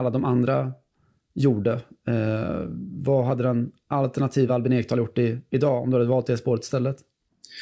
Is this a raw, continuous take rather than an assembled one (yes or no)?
yes